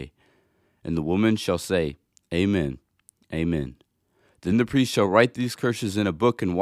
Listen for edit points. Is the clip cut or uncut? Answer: uncut